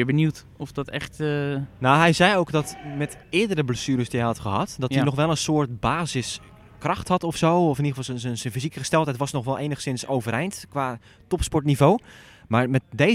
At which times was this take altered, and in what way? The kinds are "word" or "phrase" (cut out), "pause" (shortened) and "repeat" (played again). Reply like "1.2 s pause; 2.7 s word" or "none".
3.2 s pause